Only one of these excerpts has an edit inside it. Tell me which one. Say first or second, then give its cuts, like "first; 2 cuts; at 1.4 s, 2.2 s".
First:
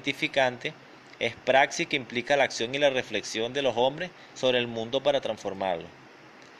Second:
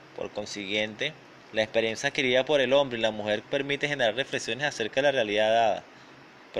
second; 1 cut; at 1.3 s